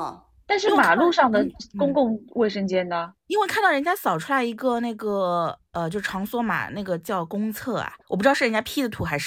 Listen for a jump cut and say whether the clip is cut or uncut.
cut